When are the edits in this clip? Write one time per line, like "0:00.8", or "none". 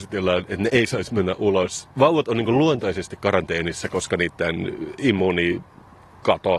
0:01.9